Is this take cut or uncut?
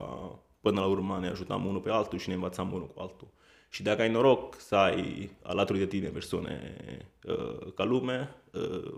uncut